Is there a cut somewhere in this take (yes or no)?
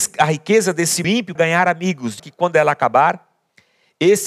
yes